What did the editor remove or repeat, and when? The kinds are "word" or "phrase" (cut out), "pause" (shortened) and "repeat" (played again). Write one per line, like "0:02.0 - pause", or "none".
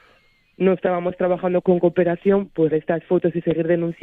0:01.6 - word
0:02.7 - word